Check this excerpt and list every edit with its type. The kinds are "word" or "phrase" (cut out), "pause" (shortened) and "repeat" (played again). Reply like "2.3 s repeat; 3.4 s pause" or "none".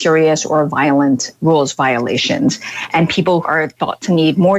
3.4 s word